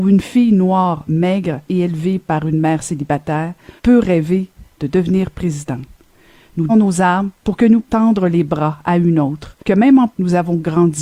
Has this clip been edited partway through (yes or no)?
yes